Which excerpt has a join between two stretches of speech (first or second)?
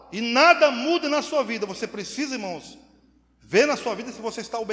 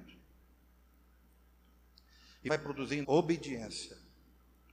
second